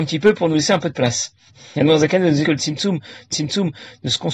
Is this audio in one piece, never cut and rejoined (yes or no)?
no